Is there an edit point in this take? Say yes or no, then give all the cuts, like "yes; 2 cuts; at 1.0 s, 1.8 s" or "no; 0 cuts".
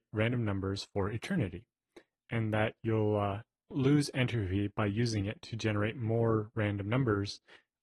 yes; 1 cut; at 3.7 s